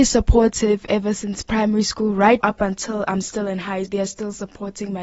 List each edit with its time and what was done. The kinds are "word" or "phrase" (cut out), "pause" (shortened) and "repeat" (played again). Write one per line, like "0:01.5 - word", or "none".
0:02.4 - word
0:03.9 - word